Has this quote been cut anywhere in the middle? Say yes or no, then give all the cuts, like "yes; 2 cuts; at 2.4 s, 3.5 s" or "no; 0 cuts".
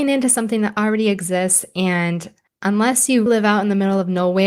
yes; 2 cuts; at 2.5 s, 3.3 s